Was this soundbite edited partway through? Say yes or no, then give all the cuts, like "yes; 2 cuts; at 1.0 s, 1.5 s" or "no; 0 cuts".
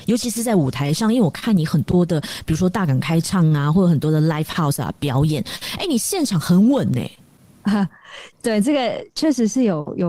no; 0 cuts